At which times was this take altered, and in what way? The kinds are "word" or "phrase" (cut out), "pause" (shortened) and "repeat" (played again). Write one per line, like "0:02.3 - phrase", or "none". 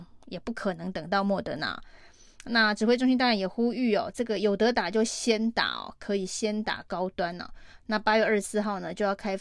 none